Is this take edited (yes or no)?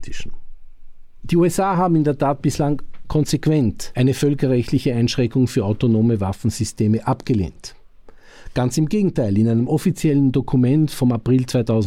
no